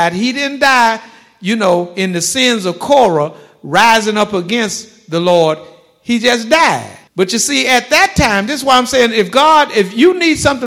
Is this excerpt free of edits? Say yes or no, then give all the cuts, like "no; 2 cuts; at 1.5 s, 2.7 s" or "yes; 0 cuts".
no; 1 cut; at 7.1 s